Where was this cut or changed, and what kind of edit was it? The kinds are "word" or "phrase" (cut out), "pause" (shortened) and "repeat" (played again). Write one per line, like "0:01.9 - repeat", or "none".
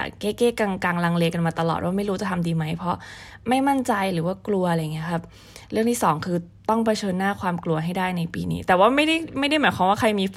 none